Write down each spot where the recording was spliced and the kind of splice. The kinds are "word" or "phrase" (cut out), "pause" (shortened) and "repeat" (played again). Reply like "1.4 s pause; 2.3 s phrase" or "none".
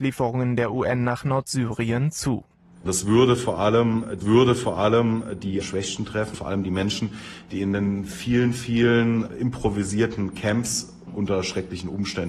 4.2 s repeat; 6.3 s word